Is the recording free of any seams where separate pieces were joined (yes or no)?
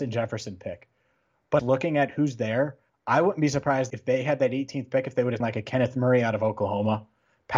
no